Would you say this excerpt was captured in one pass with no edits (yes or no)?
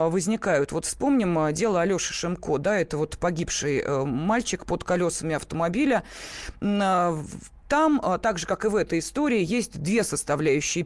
yes